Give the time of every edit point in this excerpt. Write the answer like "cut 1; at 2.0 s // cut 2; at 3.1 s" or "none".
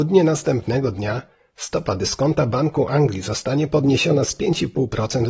none